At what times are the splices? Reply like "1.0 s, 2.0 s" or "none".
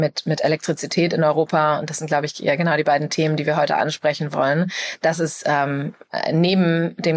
none